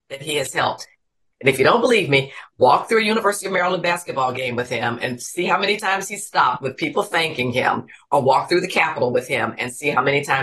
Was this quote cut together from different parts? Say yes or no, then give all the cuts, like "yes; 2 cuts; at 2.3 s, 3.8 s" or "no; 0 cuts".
no; 0 cuts